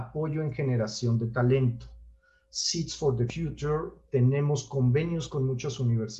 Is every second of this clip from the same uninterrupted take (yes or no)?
yes